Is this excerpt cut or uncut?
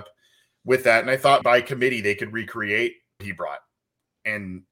cut